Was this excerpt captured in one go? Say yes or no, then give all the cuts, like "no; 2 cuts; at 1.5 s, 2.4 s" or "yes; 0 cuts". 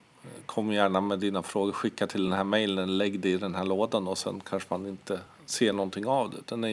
yes; 0 cuts